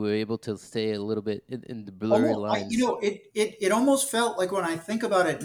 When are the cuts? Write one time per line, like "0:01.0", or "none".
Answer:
0:01.9